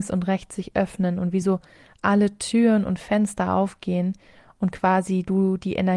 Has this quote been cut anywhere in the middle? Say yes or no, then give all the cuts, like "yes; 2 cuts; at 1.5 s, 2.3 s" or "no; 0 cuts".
no; 0 cuts